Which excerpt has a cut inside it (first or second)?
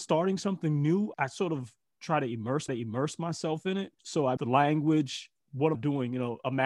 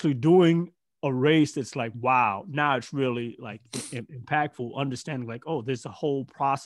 first